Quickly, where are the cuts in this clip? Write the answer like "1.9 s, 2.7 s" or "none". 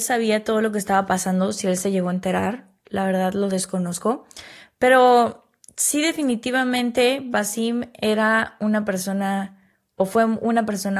none